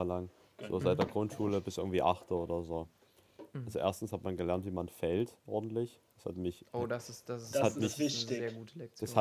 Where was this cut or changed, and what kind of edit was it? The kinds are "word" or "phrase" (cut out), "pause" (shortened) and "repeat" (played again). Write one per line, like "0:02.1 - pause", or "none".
none